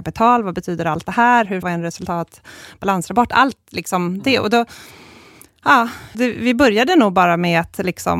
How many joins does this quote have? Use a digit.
2